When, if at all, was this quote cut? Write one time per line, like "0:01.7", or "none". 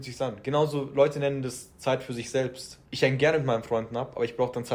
0:02.9